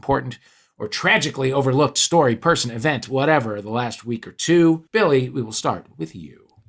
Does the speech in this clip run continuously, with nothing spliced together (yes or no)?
no